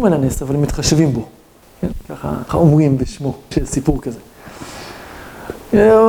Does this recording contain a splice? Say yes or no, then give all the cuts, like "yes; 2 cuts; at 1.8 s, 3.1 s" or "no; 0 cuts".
yes; 3 cuts; at 1.6 s, 2.5 s, 3.5 s